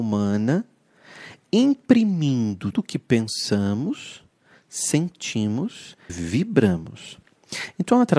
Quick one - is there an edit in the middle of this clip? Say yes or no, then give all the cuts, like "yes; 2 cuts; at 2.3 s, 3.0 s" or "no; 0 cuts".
yes; 2 cuts; at 2.7 s, 6.1 s